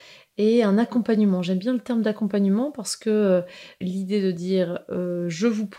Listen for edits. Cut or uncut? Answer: cut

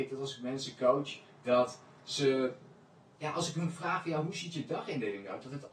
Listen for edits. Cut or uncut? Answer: uncut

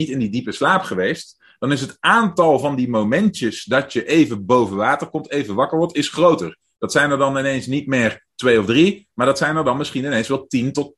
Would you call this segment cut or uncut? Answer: uncut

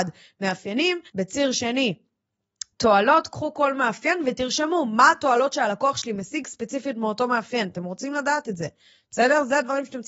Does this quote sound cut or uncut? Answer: cut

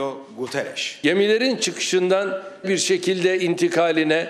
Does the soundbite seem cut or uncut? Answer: cut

